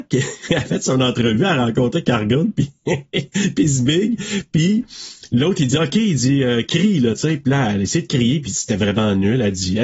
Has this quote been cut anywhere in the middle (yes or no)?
no